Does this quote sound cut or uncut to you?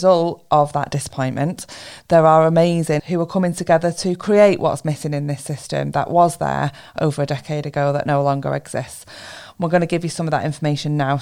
cut